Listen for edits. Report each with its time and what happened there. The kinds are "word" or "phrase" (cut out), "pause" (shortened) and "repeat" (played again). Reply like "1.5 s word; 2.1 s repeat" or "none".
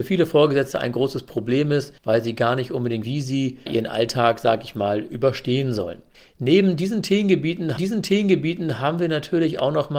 2.0 s pause; 3.0 s word; 3.7 s word; 6.1 s pause; 7.8 s repeat

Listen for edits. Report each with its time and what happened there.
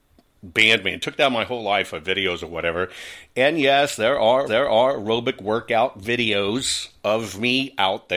4.5 s repeat

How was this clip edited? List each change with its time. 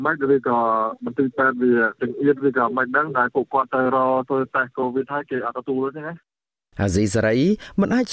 none

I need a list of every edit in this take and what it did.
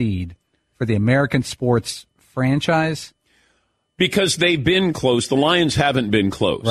2.1 s pause

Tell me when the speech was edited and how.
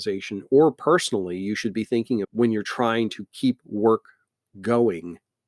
2.2 s word

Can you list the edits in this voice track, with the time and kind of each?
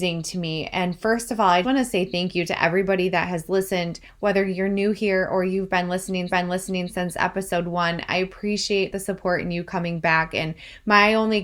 1.6 s word; 6.3 s repeat

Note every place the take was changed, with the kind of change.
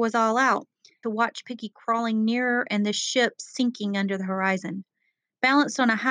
1.0 s phrase

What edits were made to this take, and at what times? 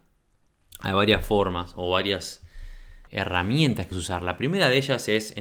3.1 s word; 3.9 s word

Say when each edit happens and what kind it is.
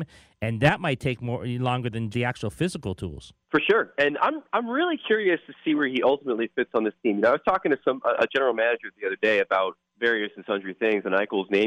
2.1 s word; 3.4 s pause; 9.9 s pause

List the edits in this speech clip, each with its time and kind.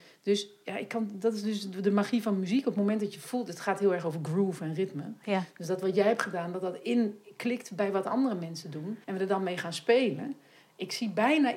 9.0 s pause

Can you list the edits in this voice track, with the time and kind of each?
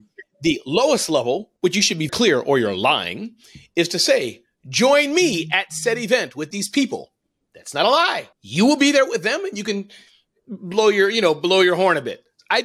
1.6 s pause; 2.1 s word; 8.3 s pause

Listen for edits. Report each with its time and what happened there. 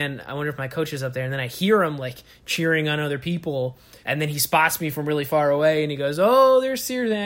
4.0 s pause

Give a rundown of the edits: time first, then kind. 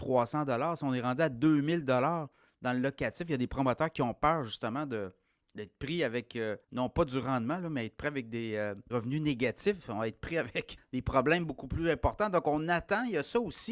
6.6 s pause; 8.9 s word; 10.8 s word

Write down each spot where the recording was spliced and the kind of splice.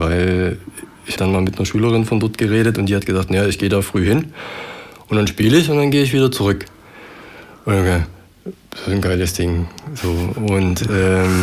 1.2 s word

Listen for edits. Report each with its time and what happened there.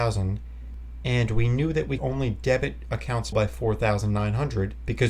2.0 s word; 3.3 s word

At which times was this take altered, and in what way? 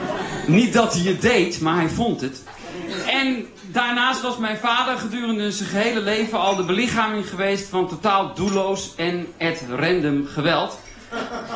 none

